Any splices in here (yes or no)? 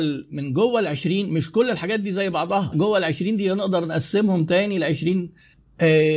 yes